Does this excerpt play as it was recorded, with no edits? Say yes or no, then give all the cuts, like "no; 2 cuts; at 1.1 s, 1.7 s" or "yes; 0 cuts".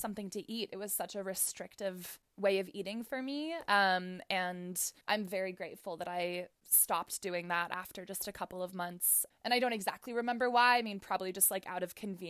no; 1 cut; at 5.0 s